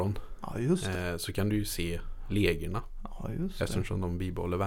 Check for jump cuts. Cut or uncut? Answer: uncut